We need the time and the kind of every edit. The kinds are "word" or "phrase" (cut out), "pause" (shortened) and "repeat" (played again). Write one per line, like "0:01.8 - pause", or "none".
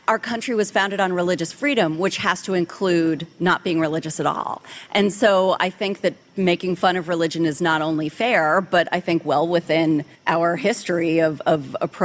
0:10.1 - pause

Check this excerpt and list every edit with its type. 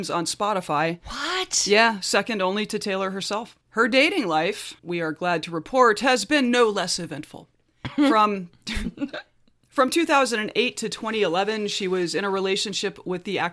0:03.6 - pause
0:04.8 - pause
0:07.5 - pause

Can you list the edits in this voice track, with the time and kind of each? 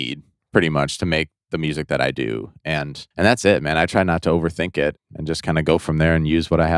0:03.1 - pause
0:05.0 - word

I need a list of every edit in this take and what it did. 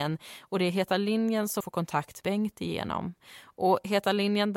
0:01.6 - word
0:02.2 - word

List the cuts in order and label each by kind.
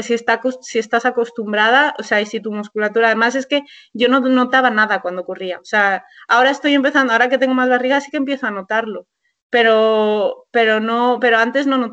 none

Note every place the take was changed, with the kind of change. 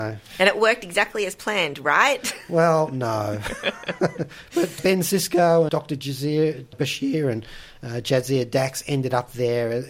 0:04.8 - word
0:05.7 - word
0:06.7 - word

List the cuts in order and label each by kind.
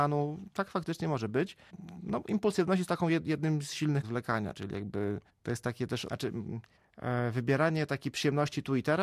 0:04.0 - word
0:06.1 - word

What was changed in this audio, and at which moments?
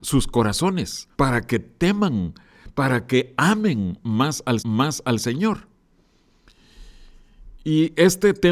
0:01.1 - pause
0:04.6 - repeat

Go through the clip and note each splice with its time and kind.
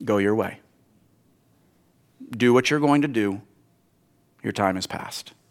none

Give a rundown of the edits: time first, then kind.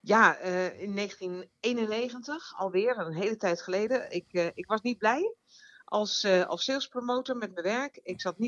none

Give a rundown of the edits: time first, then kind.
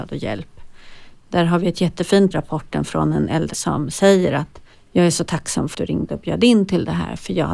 0:02.3 - phrase
0:03.5 - word
0:04.7 - pause
0:05.7 - word

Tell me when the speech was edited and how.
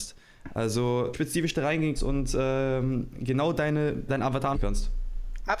0:01.1 - word
0:02.0 - word
0:04.1 - word
0:04.5 - word

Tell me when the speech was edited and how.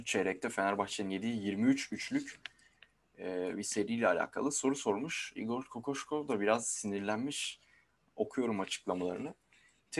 none

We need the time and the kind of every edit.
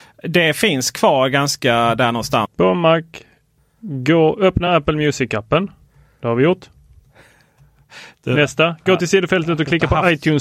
none

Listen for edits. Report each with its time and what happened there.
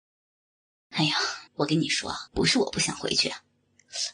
0:01.5 - pause
0:02.3 - pause

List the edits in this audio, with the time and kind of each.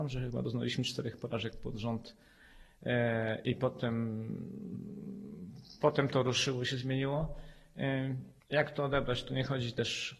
0:08.4 - pause

